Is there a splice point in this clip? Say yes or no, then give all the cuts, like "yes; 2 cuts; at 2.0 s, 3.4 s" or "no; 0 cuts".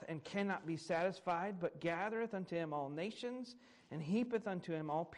no; 0 cuts